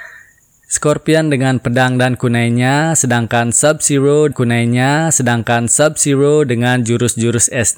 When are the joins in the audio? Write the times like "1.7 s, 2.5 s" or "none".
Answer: 4.3 s